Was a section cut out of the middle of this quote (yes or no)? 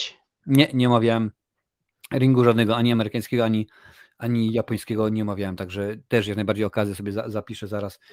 no